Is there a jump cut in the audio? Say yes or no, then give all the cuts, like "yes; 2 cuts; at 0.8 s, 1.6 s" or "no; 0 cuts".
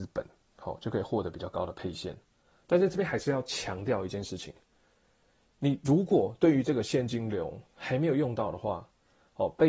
no; 0 cuts